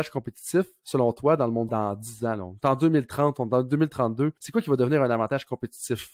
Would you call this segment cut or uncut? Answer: cut